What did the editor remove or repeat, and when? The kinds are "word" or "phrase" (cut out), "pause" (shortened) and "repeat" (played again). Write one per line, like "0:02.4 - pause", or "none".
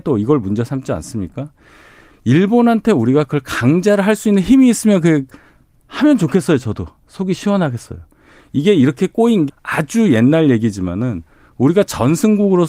0:09.5 - word